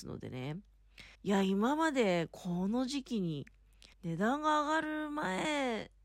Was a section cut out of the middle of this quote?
yes; 2 cuts; at 1.1 s, 3.9 s

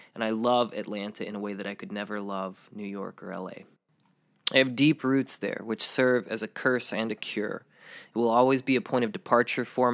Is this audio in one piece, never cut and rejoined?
yes; 0 cuts

